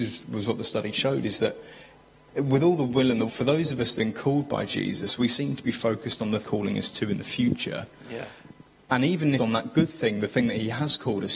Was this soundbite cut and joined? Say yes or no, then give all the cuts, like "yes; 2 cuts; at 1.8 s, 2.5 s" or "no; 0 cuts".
yes; 4 cuts; at 3.3 s, 4.0 s, 6.4 s, 9.4 s